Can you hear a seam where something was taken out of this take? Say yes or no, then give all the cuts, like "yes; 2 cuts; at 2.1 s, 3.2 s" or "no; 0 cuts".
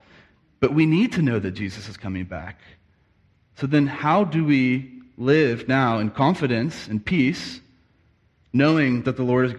no; 0 cuts